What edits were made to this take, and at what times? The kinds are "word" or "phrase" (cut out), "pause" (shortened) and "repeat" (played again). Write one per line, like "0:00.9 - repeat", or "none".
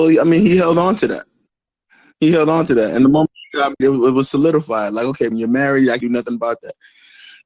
0:03.8 - word
0:05.3 - word
0:06.0 - word